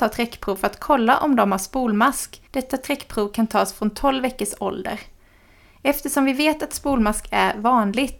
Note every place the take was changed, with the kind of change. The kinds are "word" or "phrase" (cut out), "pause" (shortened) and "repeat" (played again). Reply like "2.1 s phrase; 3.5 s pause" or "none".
2.5 s pause